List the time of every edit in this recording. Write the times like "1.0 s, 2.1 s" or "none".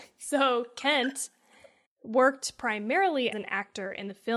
1.8 s, 3.3 s